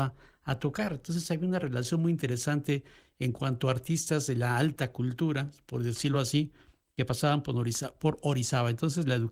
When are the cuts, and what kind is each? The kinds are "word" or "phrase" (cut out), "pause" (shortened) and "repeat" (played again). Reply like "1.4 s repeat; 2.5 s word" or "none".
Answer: none